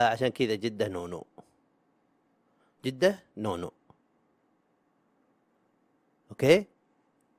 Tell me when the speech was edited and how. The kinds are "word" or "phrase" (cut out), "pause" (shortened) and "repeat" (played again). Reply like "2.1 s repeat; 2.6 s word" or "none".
none